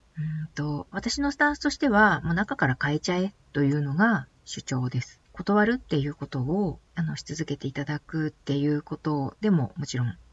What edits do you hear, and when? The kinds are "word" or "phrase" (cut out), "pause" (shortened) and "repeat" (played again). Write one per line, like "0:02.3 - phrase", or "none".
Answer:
0:05.3 - pause
0:06.9 - pause